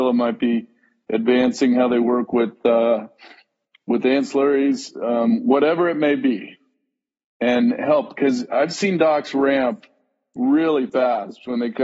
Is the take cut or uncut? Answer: uncut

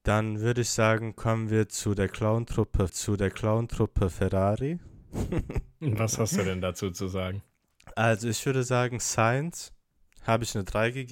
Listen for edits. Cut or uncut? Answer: cut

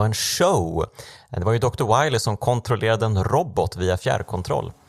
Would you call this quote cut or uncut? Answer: uncut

